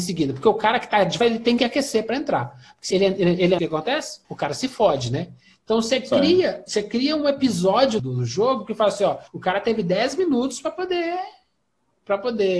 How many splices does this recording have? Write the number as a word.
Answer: six